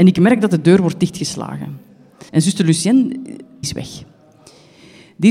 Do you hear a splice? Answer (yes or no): yes